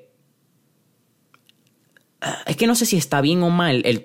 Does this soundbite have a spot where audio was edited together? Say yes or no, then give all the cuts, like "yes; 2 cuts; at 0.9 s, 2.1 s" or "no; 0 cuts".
no; 0 cuts